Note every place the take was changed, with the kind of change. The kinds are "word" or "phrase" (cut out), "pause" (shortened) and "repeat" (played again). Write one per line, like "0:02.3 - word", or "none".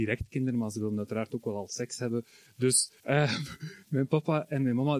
0:03.0 - pause